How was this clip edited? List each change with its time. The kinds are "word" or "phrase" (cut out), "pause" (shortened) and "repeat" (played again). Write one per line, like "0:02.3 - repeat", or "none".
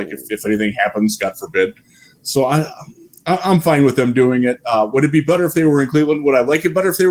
none

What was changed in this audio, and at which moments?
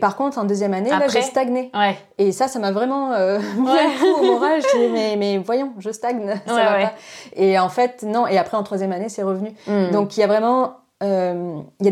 none

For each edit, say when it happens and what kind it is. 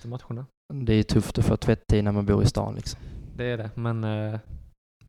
none

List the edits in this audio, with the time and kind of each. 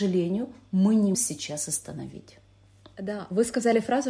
0:01.1 - word

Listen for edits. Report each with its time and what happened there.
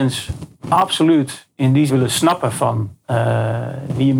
0:01.5 - pause
0:01.9 - phrase

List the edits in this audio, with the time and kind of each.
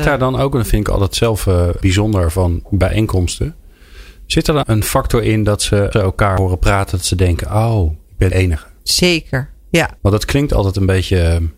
0:01.8 - word
0:04.6 - phrase
0:05.9 - word
0:08.3 - phrase
0:10.0 - pause

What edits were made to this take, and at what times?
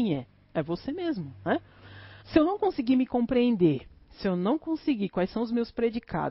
0:02.2 - pause

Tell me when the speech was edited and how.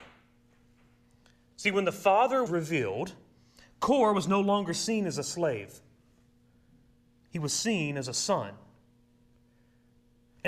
0:02.5 - word

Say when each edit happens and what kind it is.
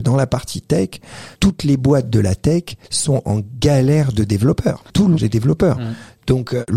0:01.3 - pause
0:02.8 - pause
0:05.2 - phrase

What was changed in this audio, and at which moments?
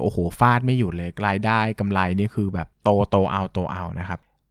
0:02.7 - pause

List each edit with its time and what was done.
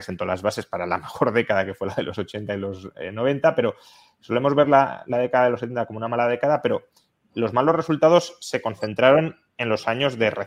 none

